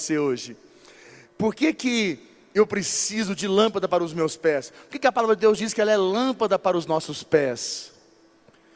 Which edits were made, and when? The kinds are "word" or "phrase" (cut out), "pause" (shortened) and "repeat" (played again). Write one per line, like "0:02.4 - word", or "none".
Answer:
none

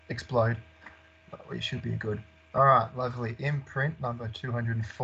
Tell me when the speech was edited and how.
none

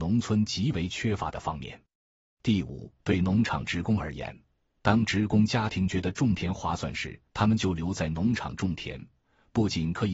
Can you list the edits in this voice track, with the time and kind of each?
0:03.0 - pause
0:07.3 - pause

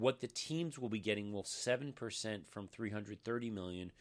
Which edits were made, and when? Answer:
0:01.4 - word

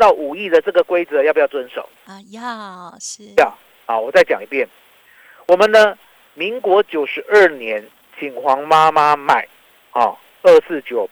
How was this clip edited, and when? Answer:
none

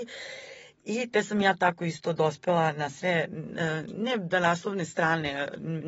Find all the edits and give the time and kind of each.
none

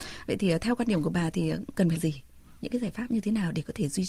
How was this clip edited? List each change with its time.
0:02.0 - word

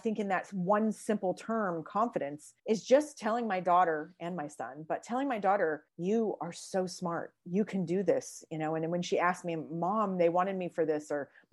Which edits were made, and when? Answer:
0:02.6 - pause
0:05.9 - pause

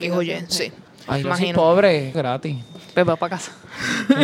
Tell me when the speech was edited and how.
0:01.2 - phrase
0:02.1 - phrase

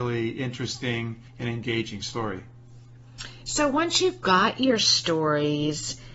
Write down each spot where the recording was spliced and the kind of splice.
0:01.3 - pause

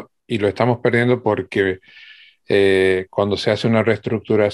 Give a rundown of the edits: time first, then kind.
none

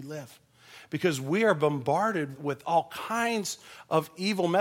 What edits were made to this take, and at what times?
0:02.3 - word

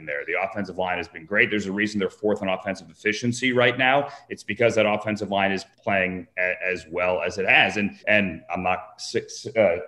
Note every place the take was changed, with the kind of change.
0:05.7 - pause
0:08.0 - pause

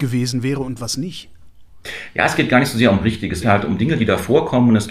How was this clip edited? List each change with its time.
0:03.4 - word

